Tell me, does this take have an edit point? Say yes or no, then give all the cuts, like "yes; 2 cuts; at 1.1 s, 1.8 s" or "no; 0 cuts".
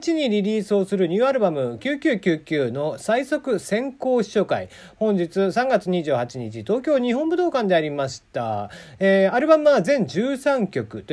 no; 0 cuts